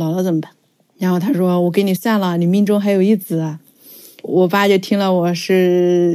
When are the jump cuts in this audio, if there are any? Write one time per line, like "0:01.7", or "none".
none